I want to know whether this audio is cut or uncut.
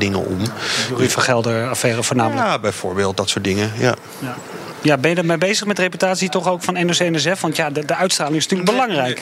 uncut